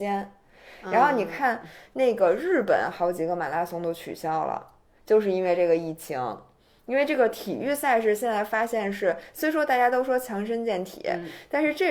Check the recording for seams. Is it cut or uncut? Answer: uncut